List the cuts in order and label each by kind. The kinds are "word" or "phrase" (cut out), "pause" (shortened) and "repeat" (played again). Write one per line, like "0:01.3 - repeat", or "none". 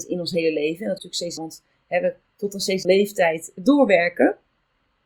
0:01.0 - word
0:01.4 - word
0:02.2 - word
0:02.8 - word